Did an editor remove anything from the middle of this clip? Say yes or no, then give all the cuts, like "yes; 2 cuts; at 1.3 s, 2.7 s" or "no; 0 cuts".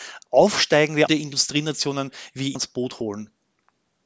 yes; 2 cuts; at 1.1 s, 2.5 s